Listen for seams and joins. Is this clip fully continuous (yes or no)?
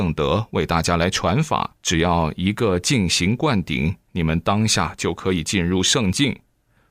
no